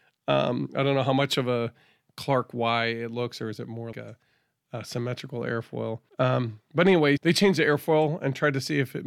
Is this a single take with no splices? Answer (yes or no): no